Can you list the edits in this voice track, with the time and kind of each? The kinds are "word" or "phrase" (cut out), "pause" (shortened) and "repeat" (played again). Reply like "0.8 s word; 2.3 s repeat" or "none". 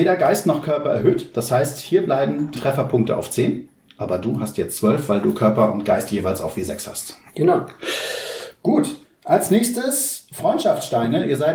2.5 s word; 7.3 s pause; 9.0 s pause